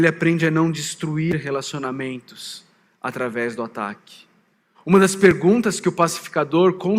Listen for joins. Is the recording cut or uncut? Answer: uncut